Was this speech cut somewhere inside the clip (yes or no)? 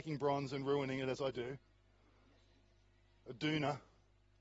no